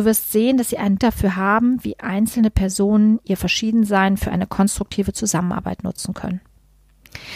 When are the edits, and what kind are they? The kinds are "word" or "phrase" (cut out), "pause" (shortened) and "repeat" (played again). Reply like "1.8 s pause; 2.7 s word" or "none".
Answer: 1.0 s word